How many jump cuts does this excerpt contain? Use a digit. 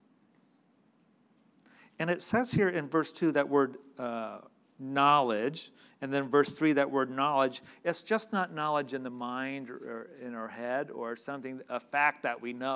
0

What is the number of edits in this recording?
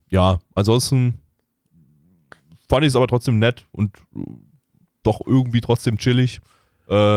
0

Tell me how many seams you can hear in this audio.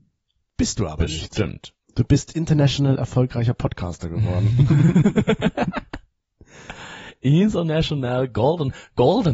1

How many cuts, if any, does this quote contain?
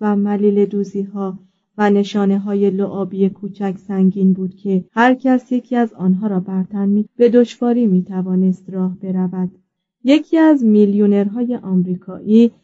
3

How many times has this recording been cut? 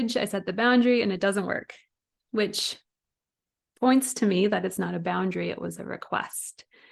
0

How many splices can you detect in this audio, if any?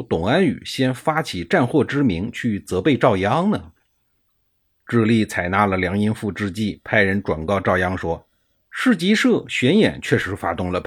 0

